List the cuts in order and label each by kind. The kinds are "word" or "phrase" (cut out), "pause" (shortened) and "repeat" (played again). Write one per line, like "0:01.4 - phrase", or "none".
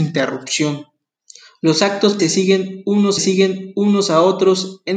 0:01.1 - pause
0:02.2 - word
0:03.2 - repeat

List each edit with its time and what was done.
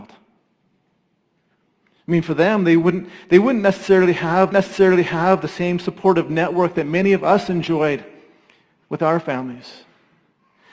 0:04.5 - repeat

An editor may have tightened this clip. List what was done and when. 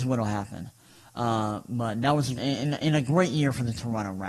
0:02.4 - phrase

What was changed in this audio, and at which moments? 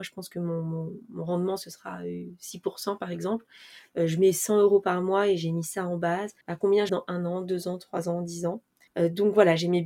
0:06.4 - pause
0:06.9 - word
0:08.9 - pause

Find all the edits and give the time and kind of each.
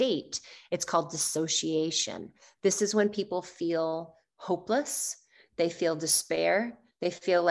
none

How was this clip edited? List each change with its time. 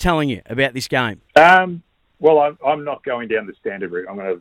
0:01.3 - pause

